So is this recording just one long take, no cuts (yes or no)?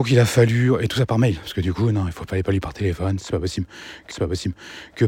no